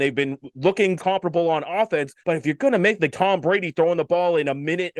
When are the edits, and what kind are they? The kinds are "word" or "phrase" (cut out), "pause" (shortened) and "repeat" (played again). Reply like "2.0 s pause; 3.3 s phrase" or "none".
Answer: 1.0 s word; 2.2 s pause; 3.1 s phrase